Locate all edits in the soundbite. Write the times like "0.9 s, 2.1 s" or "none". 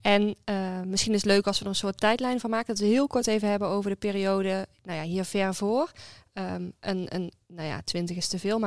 none